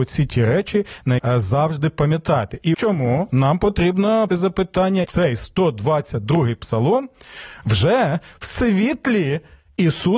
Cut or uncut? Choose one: cut